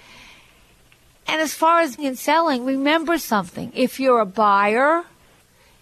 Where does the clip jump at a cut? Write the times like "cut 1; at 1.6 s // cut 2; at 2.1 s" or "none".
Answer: cut 1; at 2.0 s